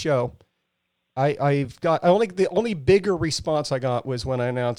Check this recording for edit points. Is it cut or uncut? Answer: uncut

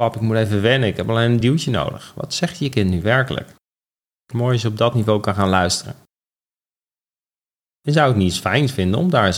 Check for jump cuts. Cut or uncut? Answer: uncut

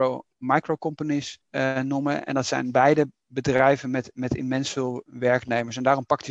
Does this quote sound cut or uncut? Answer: cut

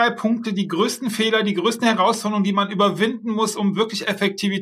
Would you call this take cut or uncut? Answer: uncut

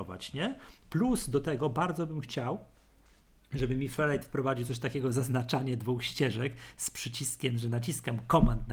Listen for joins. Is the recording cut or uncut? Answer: uncut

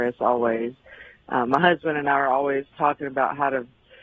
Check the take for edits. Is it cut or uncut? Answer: uncut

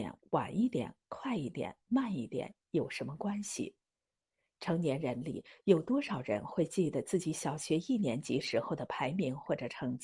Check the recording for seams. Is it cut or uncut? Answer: uncut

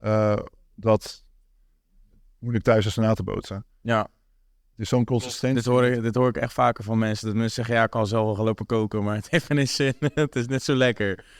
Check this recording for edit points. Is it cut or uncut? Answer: uncut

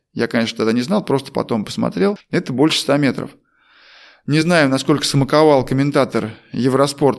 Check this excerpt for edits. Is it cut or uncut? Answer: uncut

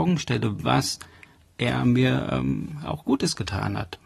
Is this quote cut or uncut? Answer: uncut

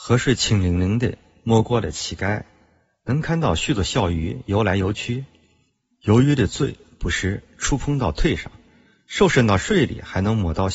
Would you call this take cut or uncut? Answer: uncut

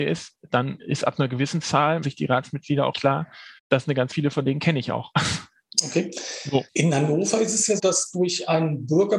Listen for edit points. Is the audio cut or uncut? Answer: cut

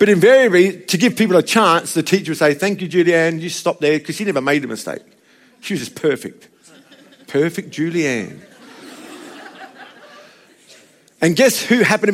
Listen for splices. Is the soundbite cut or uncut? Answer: uncut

